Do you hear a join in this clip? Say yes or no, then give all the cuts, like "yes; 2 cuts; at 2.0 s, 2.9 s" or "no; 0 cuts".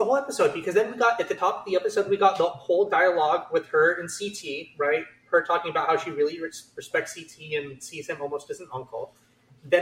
no; 0 cuts